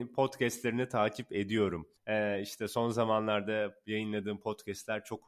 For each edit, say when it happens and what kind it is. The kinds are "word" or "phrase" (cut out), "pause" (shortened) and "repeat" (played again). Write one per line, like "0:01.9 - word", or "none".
0:02.0 - pause